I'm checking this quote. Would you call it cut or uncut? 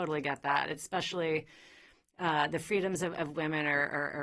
uncut